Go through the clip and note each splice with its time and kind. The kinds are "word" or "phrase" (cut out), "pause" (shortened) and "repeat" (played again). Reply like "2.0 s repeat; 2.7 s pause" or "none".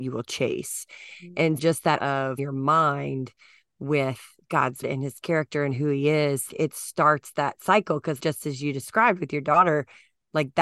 1.6 s word; 2.0 s word; 2.4 s word; 4.8 s word; 6.5 s word; 8.2 s word